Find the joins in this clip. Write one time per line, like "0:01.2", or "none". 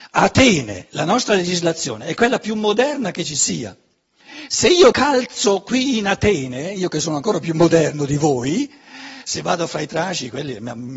0:04.9